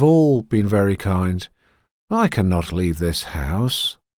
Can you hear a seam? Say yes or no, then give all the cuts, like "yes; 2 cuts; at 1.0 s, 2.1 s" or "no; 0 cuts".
no; 0 cuts